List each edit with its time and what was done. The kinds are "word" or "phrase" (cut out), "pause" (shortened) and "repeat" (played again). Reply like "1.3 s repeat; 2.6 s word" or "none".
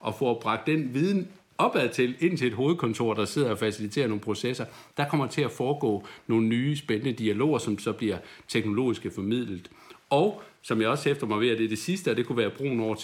none